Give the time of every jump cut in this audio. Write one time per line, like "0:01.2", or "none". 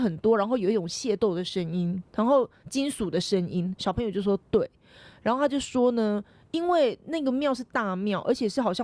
0:02.1